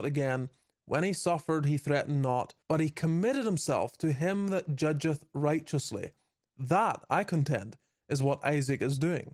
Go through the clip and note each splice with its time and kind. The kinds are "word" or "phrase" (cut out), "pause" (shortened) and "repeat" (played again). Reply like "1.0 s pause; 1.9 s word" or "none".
2.6 s pause